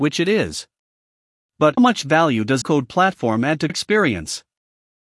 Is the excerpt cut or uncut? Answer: cut